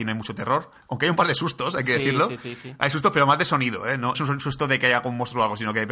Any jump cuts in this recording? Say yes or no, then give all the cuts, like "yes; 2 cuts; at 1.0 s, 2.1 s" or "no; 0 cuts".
yes; 1 cut; at 4.1 s